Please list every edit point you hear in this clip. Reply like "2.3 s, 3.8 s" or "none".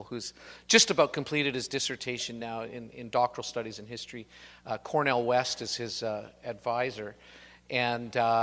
none